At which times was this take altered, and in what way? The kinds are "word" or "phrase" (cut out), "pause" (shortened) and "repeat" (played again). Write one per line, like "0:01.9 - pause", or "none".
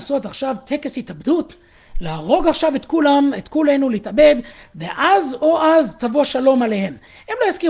none